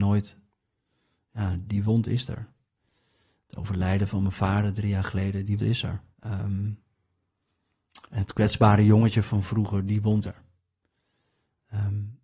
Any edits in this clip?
yes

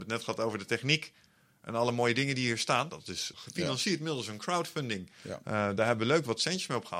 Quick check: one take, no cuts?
no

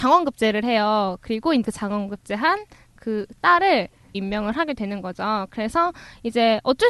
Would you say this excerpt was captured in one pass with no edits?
no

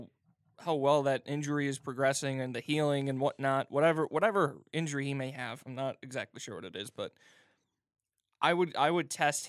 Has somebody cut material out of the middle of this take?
no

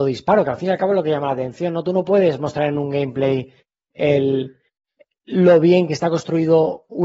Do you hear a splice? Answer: no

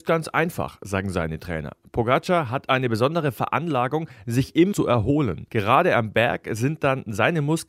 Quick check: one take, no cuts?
no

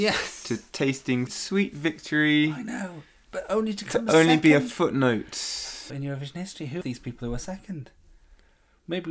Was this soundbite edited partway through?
yes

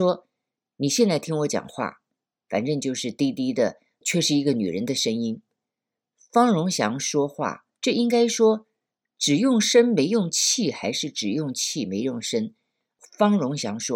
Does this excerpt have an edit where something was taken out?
yes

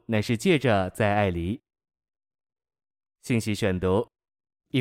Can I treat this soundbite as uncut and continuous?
yes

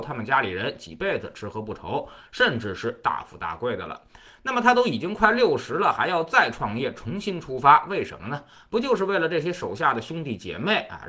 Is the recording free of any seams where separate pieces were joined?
yes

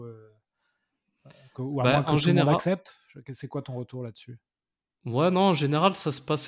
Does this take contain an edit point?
no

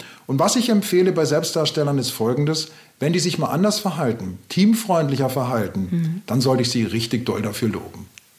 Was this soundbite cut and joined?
no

